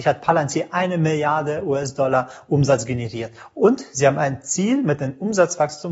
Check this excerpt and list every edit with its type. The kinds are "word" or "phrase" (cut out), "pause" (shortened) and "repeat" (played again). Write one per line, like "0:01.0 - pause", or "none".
none